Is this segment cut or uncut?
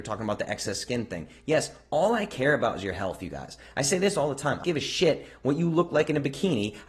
cut